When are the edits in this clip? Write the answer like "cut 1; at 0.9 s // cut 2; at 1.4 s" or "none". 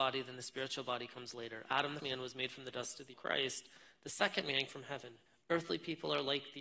cut 1; at 2.0 s // cut 2; at 3.1 s // cut 3; at 4.7 s // cut 4; at 5.3 s